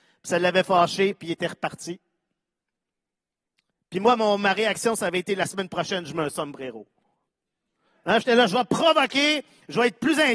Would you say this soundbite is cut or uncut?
uncut